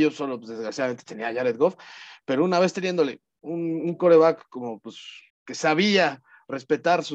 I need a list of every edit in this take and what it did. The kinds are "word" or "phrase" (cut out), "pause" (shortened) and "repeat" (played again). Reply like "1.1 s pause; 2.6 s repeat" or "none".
5.3 s pause